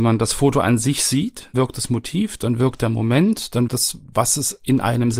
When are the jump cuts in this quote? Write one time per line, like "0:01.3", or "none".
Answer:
0:01.5
0:03.7

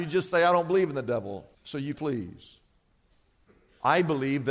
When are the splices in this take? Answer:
0:01.5
0:01.9

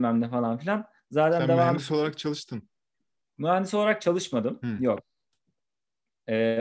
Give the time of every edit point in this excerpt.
none

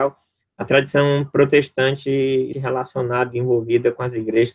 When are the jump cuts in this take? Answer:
0:02.5

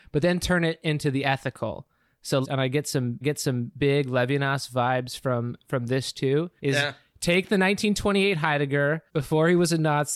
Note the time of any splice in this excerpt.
0:02.4
0:03.2
0:06.6
0:09.1

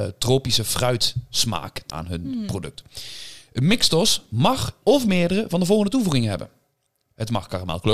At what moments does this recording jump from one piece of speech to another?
0:01.9
0:04.8

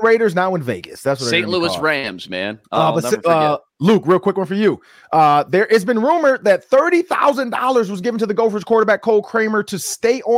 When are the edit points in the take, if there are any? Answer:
none

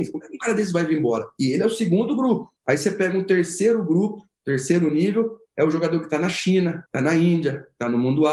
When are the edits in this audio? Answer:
0:02.6
0:06.9

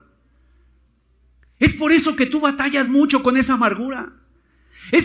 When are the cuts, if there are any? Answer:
none

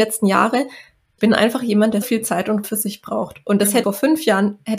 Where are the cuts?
0:01.2
0:02.0
0:02.6
0:03.8

